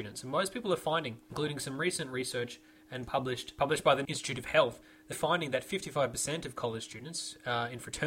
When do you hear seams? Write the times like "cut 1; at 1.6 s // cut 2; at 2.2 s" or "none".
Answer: cut 1; at 2.8 s // cut 2; at 4.0 s // cut 3; at 5.1 s